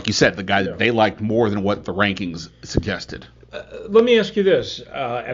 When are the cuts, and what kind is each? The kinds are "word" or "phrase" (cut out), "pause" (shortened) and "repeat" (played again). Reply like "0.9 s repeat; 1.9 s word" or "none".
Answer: none